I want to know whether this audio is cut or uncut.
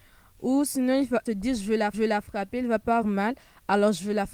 cut